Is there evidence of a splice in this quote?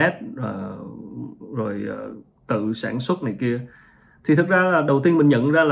no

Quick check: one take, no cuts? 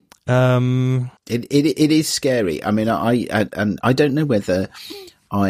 no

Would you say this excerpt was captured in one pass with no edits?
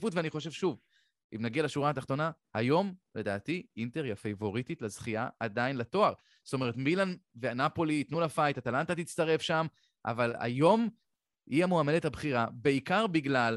yes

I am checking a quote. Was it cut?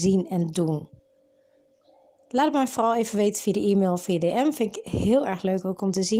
no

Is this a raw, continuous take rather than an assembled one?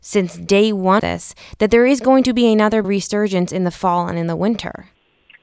no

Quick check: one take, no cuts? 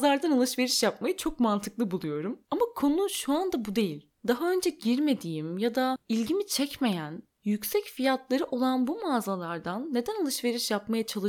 no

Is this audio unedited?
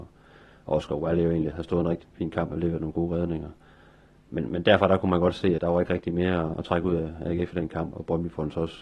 no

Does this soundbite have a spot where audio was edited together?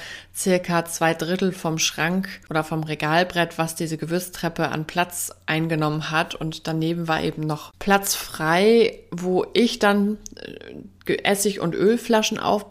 no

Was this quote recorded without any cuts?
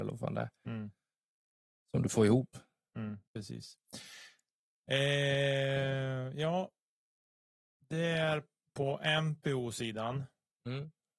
no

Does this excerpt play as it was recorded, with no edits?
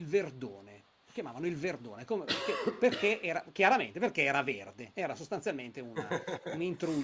yes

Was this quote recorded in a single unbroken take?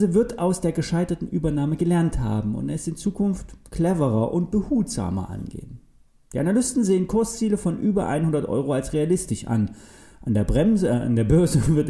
yes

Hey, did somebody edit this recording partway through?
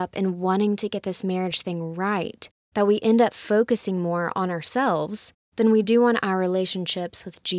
no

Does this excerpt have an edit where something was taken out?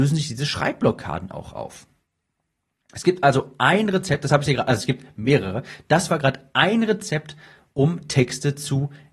no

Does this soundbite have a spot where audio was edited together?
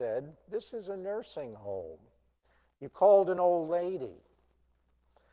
no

